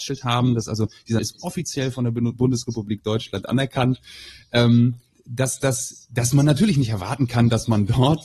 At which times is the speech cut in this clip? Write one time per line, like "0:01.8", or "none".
0:01.2
0:05.1